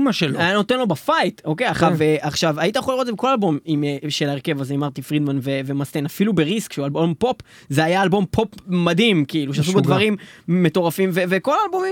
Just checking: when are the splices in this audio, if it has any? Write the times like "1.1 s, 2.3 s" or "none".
none